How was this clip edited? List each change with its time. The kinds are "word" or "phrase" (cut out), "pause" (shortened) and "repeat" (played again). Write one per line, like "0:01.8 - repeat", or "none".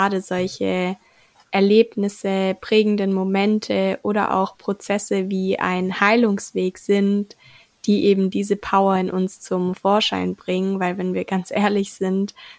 none